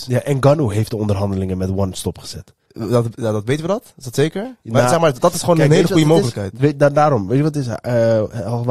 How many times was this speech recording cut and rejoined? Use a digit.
0